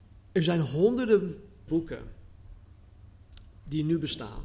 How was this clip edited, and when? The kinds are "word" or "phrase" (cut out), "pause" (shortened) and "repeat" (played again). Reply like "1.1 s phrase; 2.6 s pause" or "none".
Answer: 1.7 s word